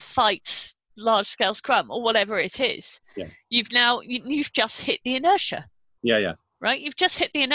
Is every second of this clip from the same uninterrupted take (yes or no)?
yes